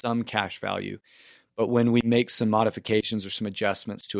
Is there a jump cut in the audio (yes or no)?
no